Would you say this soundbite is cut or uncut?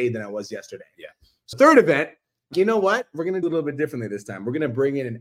cut